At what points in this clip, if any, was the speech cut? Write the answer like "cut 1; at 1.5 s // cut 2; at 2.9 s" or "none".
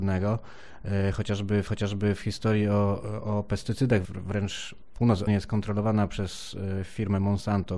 cut 1; at 1.7 s // cut 2; at 4.0 s // cut 3; at 5.3 s